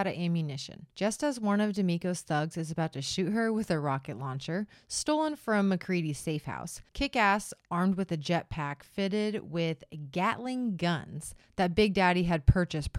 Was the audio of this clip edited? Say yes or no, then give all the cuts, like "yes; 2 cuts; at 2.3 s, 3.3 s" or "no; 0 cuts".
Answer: yes; 2 cuts; at 0.9 s, 6.9 s